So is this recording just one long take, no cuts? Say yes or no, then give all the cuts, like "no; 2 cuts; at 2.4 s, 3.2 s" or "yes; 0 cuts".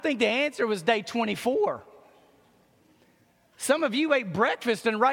yes; 0 cuts